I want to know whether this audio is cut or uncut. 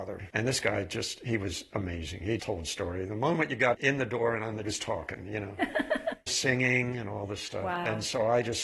cut